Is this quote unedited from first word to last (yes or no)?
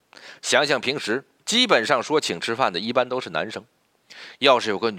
no